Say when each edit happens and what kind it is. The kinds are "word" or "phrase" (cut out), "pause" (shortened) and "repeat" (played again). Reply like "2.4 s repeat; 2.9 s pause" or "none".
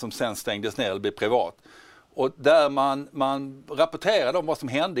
none